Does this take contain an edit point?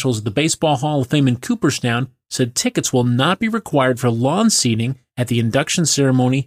no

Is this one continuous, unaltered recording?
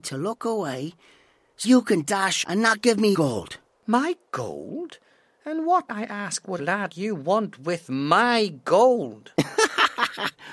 no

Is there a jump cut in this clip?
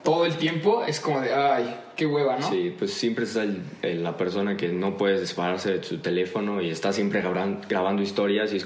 no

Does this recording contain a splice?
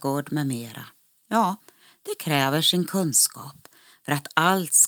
no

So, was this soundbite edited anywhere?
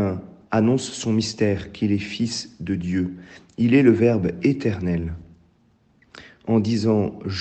no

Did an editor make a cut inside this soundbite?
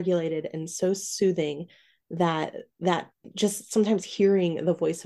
no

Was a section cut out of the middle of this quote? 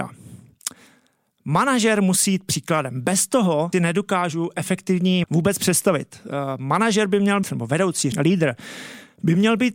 yes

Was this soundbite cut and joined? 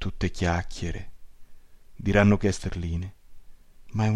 yes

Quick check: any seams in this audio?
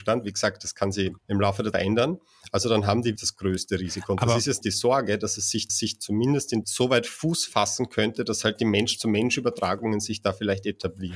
yes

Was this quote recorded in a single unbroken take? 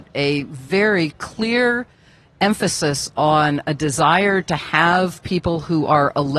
yes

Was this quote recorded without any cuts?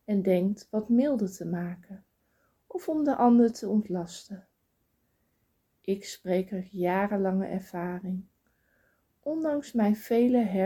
yes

